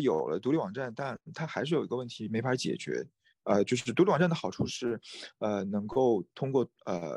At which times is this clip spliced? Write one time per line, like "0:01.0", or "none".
none